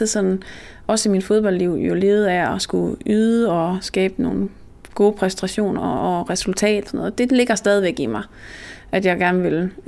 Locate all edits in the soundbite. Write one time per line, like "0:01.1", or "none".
0:06.9